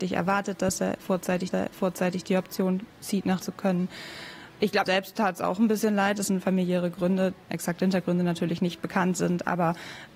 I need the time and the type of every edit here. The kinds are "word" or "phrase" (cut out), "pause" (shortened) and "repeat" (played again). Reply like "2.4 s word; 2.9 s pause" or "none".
1.5 s repeat; 2.9 s pause; 3.4 s phrase; 4.9 s word; 7.5 s word